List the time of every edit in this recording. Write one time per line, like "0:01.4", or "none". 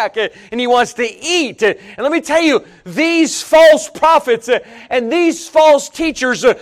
none